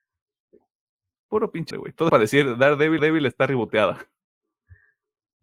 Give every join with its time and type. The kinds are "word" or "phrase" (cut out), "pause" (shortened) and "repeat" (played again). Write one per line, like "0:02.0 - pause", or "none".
0:01.7 - word
0:02.1 - word
0:03.0 - repeat